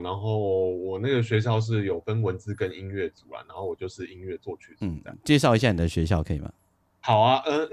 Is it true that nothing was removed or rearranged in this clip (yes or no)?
yes